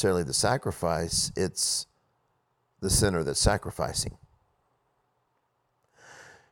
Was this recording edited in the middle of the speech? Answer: no; 0 cuts

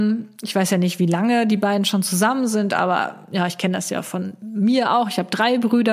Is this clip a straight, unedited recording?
yes; 0 cuts

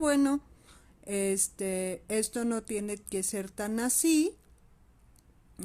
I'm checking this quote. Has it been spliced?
no; 0 cuts

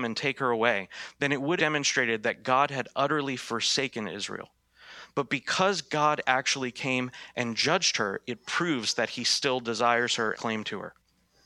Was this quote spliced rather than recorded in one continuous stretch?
yes; 2 cuts; at 1.6 s, 10.3 s

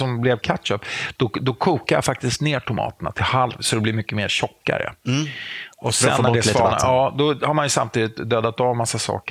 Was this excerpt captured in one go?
no; 1 cut; at 5.7 s

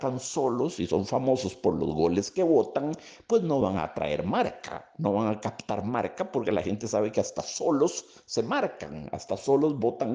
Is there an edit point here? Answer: no; 0 cuts

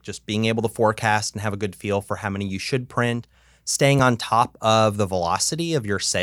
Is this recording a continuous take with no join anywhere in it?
yes; 0 cuts

